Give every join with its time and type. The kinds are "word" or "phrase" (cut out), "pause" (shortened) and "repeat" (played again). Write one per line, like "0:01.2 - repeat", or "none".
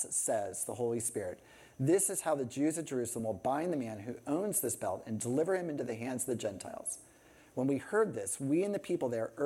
none